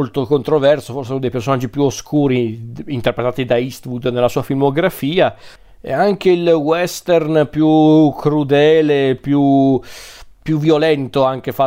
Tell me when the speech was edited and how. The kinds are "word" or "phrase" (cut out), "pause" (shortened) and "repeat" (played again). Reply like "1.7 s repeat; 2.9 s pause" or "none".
none